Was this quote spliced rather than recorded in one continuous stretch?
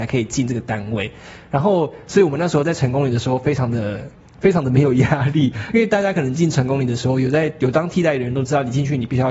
no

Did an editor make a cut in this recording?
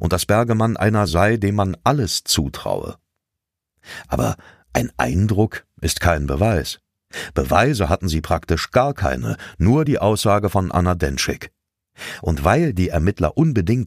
no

